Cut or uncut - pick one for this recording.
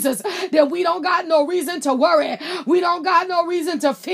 uncut